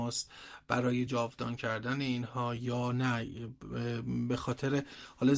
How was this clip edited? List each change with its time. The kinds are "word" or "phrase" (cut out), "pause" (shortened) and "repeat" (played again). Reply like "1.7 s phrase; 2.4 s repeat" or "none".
none